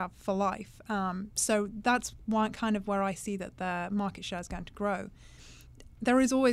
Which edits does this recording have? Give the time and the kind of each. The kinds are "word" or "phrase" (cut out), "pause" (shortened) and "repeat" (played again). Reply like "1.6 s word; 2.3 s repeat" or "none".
none